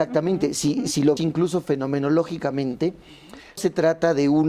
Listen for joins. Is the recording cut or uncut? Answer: cut